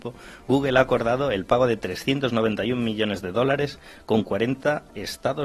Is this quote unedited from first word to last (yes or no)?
yes